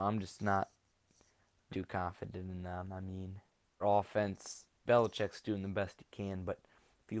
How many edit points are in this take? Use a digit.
3